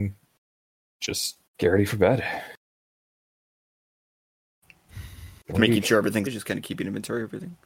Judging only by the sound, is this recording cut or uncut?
cut